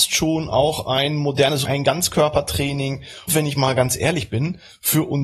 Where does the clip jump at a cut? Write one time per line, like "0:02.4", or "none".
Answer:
0:01.7
0:03.3

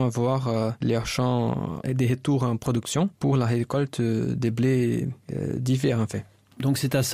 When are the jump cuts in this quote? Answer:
0:01.8

